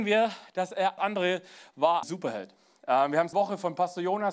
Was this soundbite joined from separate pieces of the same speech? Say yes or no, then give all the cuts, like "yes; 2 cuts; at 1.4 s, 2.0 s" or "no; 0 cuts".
yes; 3 cuts; at 1.0 s, 2.0 s, 3.3 s